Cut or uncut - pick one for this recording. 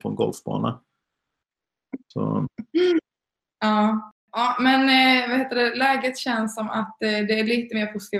uncut